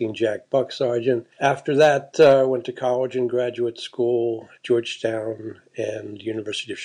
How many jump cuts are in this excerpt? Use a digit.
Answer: 1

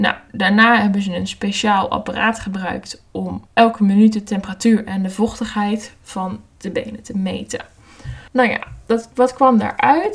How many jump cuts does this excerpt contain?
2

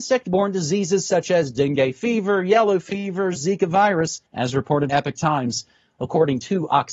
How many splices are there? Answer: 2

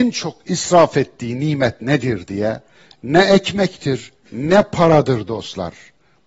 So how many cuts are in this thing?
0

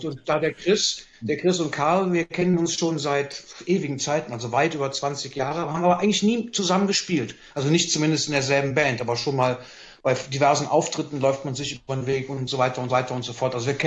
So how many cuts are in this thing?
1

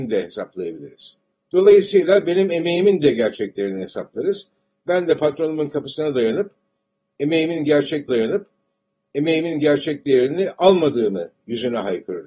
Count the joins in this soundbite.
2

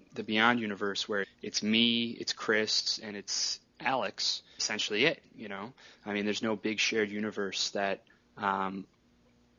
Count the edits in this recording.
2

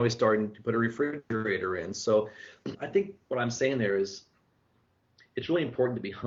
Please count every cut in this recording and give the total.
0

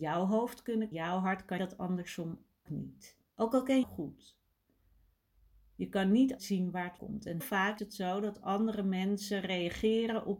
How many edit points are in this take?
9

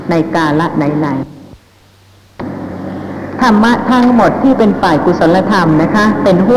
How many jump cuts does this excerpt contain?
1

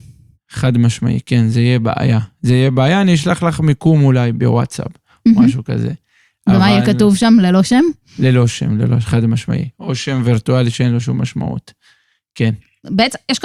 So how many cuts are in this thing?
0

